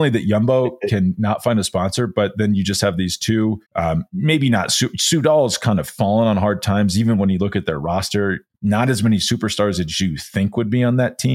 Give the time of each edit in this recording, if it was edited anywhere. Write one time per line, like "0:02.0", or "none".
0:03.7
0:08.5